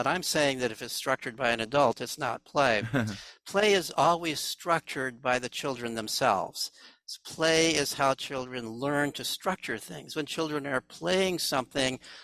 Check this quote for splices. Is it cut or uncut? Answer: uncut